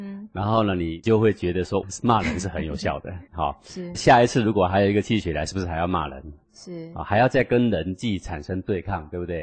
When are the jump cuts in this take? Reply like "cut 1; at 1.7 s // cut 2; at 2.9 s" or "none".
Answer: cut 1; at 3.3 s // cut 2; at 3.9 s